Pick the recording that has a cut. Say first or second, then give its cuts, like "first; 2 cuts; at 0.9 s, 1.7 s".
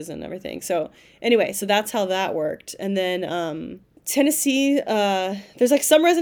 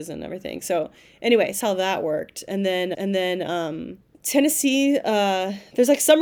second; 2 cuts; at 1.6 s, 2.9 s